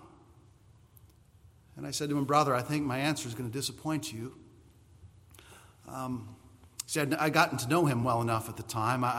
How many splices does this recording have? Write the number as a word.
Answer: zero